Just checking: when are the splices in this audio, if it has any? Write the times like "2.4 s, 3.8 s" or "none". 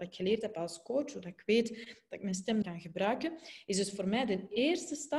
2.6 s

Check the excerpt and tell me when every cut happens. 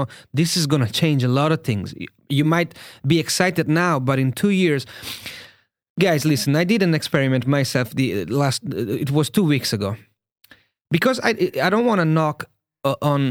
none

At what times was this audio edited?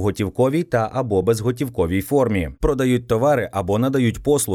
none

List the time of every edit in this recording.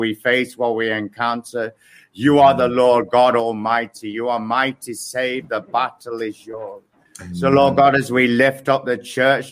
none

